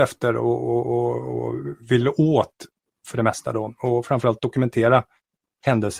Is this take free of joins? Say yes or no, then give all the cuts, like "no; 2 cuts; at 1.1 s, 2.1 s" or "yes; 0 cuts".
yes; 0 cuts